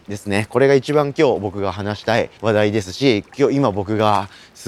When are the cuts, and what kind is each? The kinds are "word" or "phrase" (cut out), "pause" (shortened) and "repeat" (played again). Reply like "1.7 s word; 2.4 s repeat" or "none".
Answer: 2.4 s pause